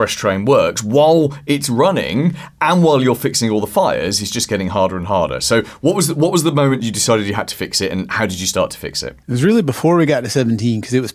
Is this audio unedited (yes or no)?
no